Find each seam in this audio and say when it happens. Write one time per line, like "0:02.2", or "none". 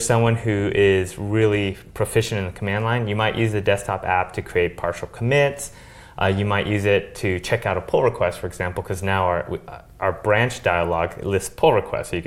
none

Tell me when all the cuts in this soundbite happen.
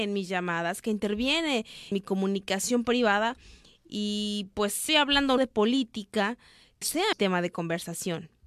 0:01.9
0:04.9
0:05.4
0:06.8
0:07.1

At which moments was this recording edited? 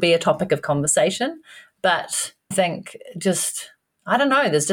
0:02.5

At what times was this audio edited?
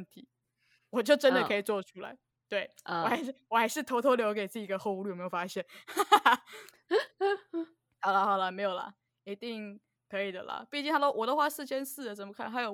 none

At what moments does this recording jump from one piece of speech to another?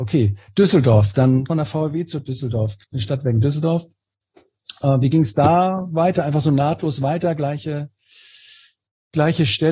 0:01.5
0:02.8

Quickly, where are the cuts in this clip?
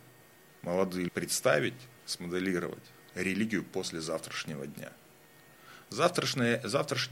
0:01.1
0:02.0

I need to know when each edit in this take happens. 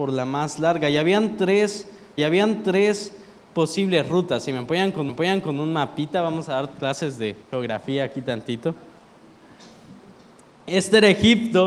0:02.2
0:05.1
0:07.4

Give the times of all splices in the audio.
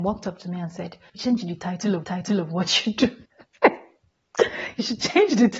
0:01.1
0:02.0
0:03.2

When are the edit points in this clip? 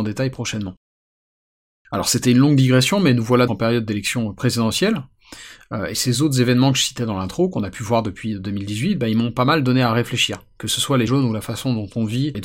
0:03.5
0:11.1

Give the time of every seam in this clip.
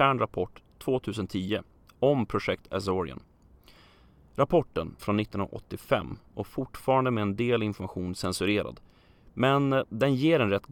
0:05.0

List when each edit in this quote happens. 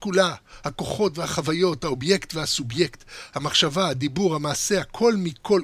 none

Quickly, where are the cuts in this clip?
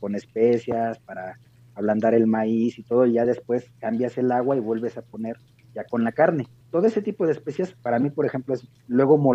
none

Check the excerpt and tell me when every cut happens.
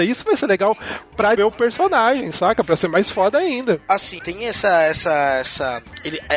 0:01.4
0:04.2

